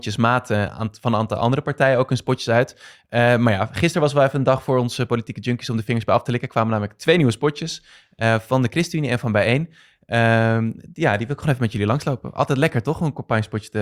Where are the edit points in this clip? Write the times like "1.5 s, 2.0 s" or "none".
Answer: none

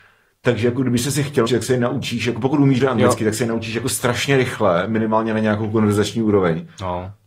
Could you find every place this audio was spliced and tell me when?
1.5 s, 2.8 s

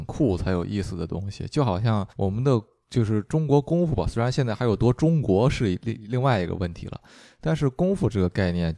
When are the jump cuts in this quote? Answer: 2.1 s

